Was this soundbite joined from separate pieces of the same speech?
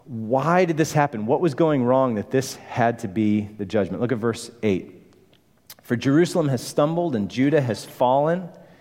no; 0 cuts

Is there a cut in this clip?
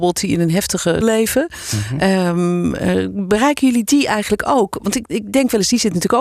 yes; 1 cut; at 1.0 s

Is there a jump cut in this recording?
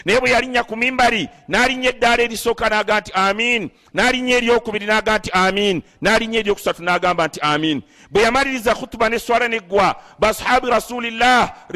no; 0 cuts

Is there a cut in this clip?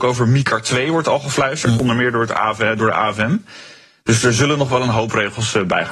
no; 0 cuts

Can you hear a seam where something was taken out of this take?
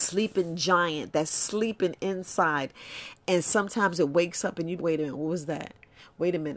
yes; 1 cut; at 4.8 s

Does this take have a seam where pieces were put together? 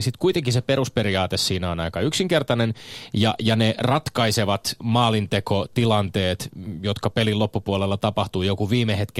yes; 1 cut; at 4.8 s

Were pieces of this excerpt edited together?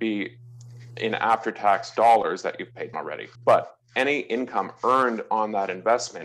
yes; 2 cuts; at 2.9 s, 3.3 s

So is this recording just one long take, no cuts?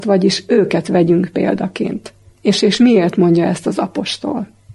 no; 1 cut; at 2.3 s

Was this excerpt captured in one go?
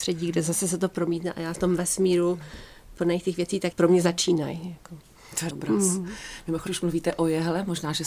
no; 4 cuts; at 1.5 s, 3.7 s, 5.5 s, 6.7 s

